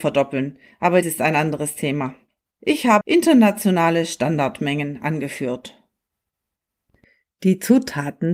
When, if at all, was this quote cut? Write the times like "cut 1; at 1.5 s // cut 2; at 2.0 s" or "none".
cut 1; at 1.0 s // cut 2; at 2.3 s // cut 3; at 3.0 s